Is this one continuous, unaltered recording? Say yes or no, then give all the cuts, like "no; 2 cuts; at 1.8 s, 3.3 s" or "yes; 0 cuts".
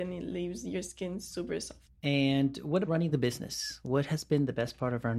no; 2 cuts; at 1.9 s, 2.8 s